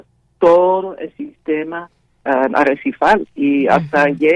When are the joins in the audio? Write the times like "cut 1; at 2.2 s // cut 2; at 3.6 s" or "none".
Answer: none